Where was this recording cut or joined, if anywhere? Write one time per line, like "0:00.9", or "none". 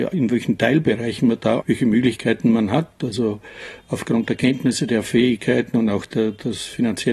0:01.6